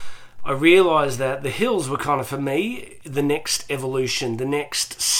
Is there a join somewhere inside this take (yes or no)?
no